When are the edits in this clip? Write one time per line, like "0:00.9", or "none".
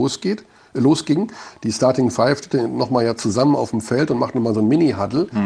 none